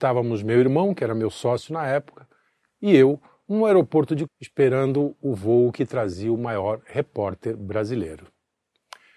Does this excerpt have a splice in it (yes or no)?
yes